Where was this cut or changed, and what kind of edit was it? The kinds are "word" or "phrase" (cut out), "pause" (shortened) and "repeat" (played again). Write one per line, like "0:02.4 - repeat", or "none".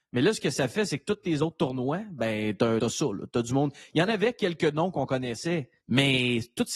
0:02.8 - word
0:05.8 - pause